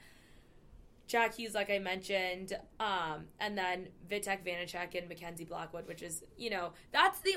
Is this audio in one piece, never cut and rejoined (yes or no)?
yes